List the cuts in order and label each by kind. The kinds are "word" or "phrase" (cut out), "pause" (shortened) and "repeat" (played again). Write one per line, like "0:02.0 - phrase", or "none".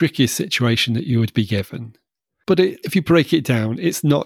none